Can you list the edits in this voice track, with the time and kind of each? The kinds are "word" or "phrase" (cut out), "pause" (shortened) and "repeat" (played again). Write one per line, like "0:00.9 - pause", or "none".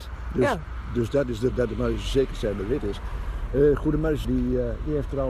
0:01.5 - word
0:04.2 - word